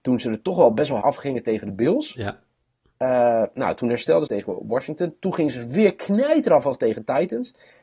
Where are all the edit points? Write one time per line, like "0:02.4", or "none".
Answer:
0:01.0
0:04.3